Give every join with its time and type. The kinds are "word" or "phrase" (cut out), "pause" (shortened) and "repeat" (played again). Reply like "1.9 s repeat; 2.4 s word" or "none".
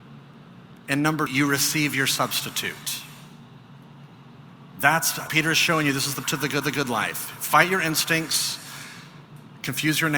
1.3 s word; 5.3 s word; 6.2 s word; 6.6 s repeat